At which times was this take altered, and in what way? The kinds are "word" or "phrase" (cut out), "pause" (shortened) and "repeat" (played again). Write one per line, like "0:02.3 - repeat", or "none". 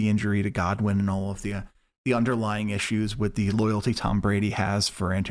none